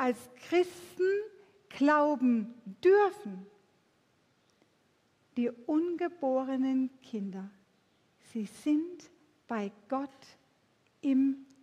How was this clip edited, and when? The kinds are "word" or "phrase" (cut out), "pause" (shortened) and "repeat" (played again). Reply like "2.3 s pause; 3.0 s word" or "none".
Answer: none